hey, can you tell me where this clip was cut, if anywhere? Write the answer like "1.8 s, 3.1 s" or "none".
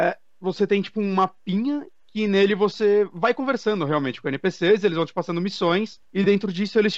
none